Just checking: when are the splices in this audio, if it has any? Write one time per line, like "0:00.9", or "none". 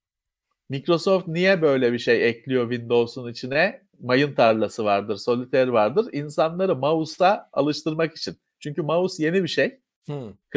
0:03.9